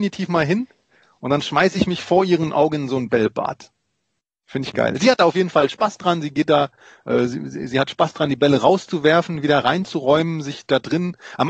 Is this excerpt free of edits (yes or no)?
yes